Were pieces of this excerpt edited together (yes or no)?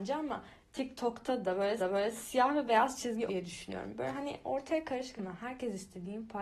yes